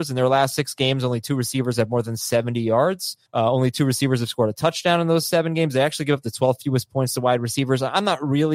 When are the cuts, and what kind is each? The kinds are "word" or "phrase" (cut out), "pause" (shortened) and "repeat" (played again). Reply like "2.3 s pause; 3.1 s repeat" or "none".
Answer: 3.3 s pause